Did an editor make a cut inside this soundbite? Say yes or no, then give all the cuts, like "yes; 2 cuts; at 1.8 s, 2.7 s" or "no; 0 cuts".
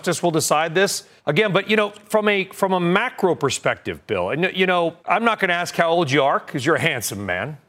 yes; 2 cuts; at 1.2 s, 5.0 s